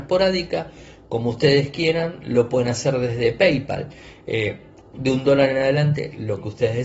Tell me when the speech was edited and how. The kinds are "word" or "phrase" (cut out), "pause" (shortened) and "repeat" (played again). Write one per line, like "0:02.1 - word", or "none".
none